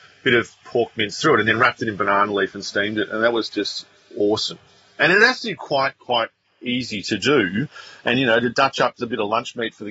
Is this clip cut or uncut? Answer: uncut